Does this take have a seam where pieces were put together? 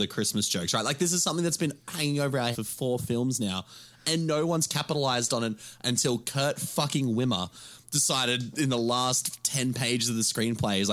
yes; 1 cut; at 2.5 s

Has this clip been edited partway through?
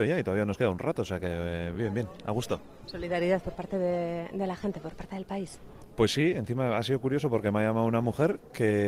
no; 0 cuts

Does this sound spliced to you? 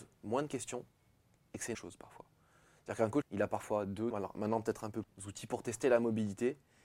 yes; 4 cuts; at 1.7 s, 3.2 s, 4.1 s, 5.0 s

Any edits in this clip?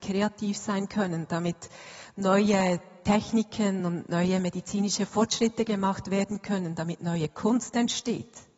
no; 0 cuts

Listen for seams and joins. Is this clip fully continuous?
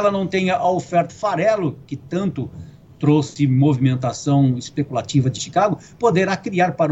no; 3 cuts; at 1.1 s, 2.9 s, 5.4 s

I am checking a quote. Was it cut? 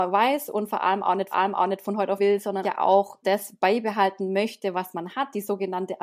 yes; 4 cuts; at 1.3 s, 2.2 s, 2.6 s, 3.2 s

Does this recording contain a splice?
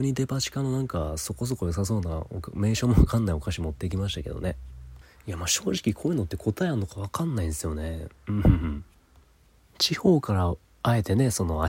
no; 0 cuts

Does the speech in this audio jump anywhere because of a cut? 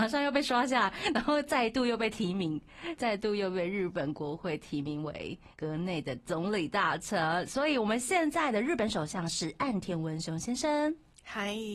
yes; 2 cuts; at 3.0 s, 5.5 s

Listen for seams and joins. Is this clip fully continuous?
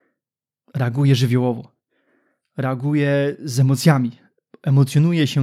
yes; 0 cuts

